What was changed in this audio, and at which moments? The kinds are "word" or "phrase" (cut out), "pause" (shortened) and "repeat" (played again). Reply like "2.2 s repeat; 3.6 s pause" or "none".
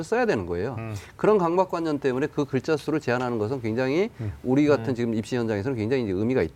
none

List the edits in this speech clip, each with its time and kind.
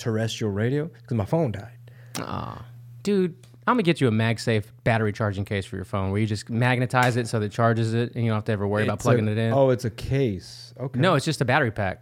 none

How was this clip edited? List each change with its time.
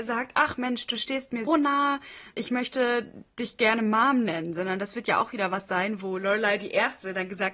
1.5 s word; 2.3 s word

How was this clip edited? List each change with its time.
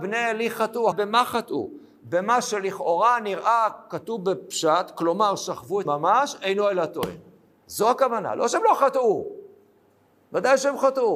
0.9 s word; 5.8 s word

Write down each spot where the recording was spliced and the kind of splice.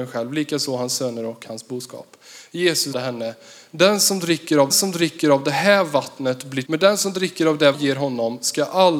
2.9 s word; 4.7 s repeat; 6.6 s phrase; 7.7 s phrase

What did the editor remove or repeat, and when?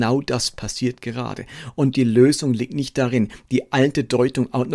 none

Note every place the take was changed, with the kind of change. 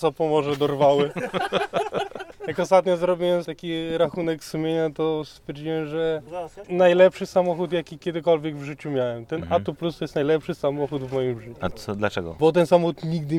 3.5 s word; 6.6 s phrase; 11.7 s word

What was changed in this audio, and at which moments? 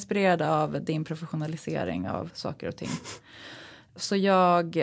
none

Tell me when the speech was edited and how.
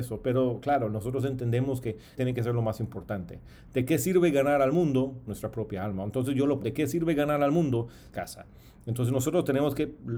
2.2 s phrase; 5.3 s phrase; 6.6 s word; 8.1 s phrase

